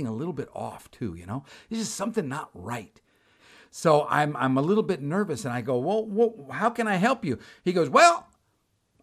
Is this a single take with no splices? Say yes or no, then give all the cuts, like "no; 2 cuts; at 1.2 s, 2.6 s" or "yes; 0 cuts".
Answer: yes; 0 cuts